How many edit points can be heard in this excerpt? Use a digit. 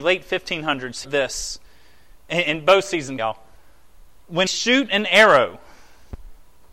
3